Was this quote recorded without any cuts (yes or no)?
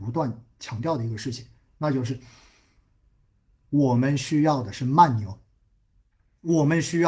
yes